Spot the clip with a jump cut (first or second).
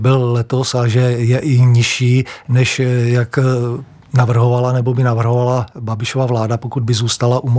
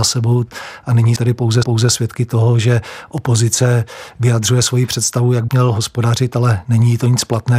second